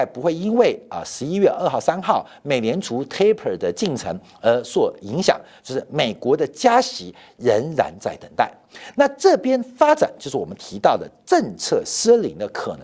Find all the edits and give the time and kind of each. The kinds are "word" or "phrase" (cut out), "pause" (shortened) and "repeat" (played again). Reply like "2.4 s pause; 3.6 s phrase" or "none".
none